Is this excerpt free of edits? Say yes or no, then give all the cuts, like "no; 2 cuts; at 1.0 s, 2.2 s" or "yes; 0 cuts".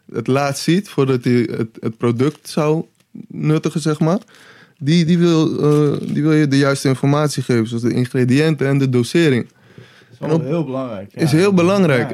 yes; 0 cuts